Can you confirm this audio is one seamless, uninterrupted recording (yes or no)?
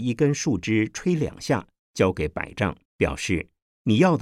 no